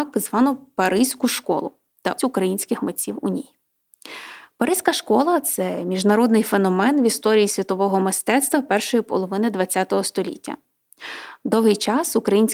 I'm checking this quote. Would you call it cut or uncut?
cut